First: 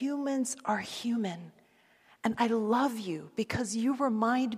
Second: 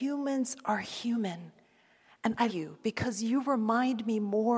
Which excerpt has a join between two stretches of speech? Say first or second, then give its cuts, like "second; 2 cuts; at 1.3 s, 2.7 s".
second; 1 cut; at 2.5 s